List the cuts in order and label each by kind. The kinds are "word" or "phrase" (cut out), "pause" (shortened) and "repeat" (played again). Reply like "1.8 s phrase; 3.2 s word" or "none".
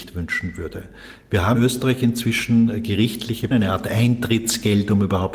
1.5 s word; 3.5 s word